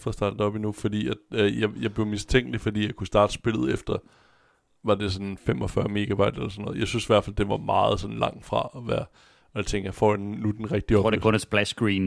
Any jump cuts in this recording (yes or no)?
no